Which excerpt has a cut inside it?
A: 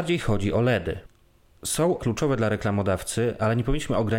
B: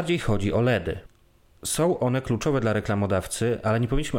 A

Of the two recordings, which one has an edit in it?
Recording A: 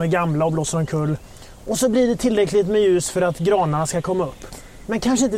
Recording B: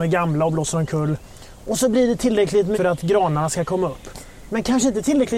B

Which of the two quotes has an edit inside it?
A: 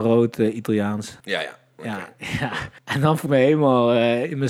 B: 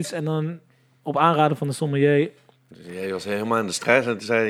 A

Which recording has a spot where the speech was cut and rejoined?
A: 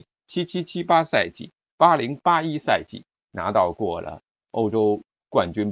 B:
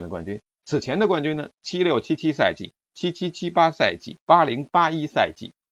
B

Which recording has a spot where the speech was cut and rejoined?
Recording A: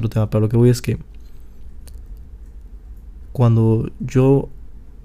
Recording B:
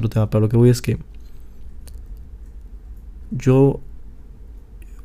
B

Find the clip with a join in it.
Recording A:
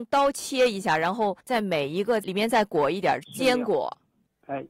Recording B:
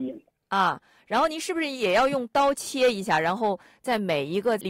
A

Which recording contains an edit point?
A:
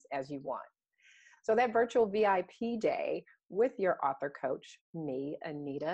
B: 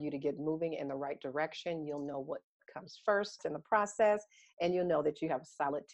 B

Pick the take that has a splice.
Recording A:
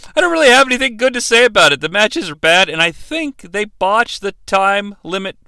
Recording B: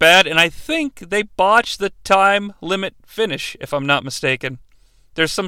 A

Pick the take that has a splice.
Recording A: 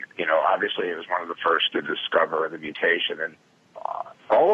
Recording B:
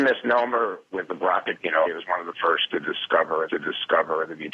B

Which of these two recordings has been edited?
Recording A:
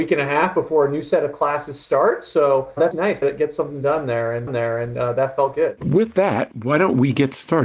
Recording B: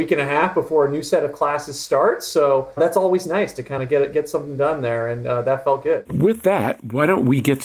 A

